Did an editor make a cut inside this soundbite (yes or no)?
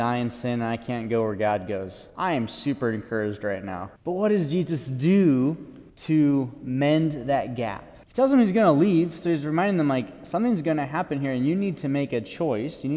yes